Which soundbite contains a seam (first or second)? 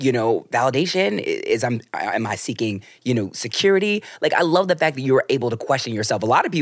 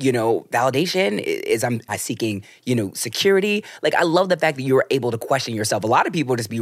second